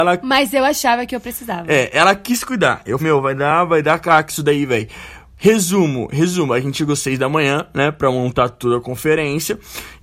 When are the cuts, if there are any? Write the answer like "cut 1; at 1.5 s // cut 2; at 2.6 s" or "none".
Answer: cut 1; at 3.0 s